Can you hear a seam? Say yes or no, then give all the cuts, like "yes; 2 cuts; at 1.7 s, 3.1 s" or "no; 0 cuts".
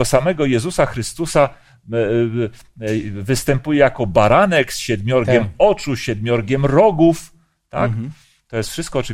no; 0 cuts